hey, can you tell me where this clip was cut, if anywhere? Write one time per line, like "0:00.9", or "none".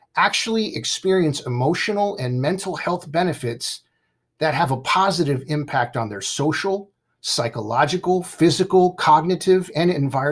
none